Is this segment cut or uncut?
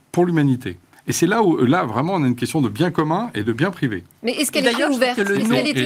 uncut